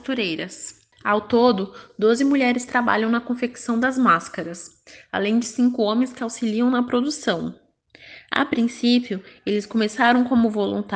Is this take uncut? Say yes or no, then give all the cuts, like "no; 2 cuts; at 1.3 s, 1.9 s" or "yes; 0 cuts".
yes; 0 cuts